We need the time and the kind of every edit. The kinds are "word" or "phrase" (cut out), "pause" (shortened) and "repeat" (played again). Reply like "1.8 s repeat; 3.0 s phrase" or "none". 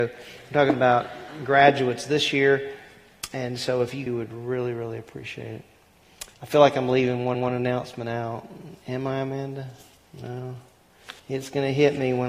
4.1 s phrase; 6.3 s pause; 7.3 s repeat; 11.2 s pause